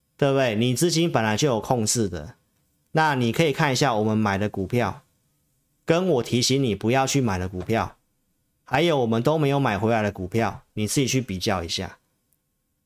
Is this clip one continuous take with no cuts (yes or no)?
yes